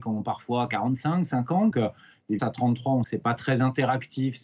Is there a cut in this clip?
yes; 3 cuts; at 1.7 s, 2.4 s, 3.0 s

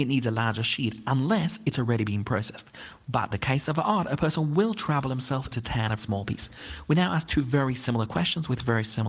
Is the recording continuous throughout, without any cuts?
no; 3 cuts; at 3.3 s, 5.5 s, 6.0 s

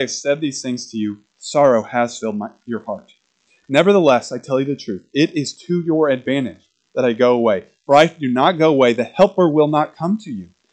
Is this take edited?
no; 0 cuts

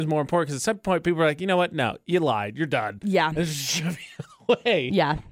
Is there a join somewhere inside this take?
no; 0 cuts

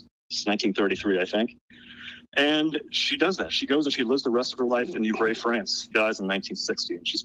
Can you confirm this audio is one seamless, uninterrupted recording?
no; 1 cut; at 5.9 s

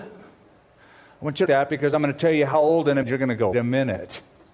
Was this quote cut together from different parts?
yes; 3 cuts; at 1.5 s, 3.0 s, 3.5 s

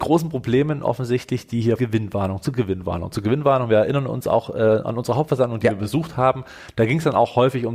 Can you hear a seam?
yes; 1 cut; at 1.8 s

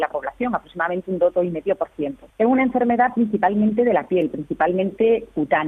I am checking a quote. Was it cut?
yes; 1 cut; at 2.3 s

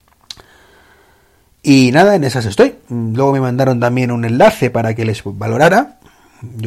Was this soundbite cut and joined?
no; 0 cuts

